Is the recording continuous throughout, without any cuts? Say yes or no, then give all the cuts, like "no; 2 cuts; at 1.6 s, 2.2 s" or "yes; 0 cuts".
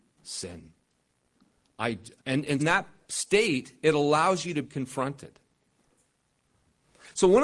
no; 3 cuts; at 2.2 s, 2.6 s, 4.7 s